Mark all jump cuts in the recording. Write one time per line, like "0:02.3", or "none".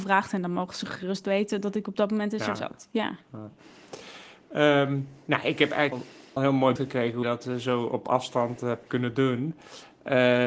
0:02.5
0:05.9
0:06.4
0:06.8
0:07.2
0:08.9